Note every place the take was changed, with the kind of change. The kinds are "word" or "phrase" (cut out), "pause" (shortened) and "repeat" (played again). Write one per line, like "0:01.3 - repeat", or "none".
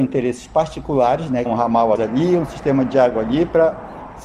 0:01.5 - phrase
0:02.0 - phrase